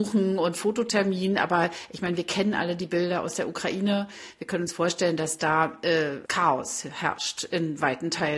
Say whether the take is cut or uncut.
cut